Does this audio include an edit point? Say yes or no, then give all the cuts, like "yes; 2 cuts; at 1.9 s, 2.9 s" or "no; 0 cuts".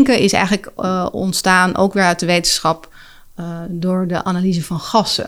no; 0 cuts